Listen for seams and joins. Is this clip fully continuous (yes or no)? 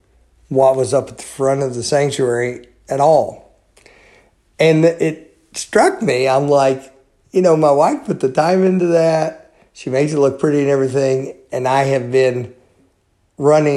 yes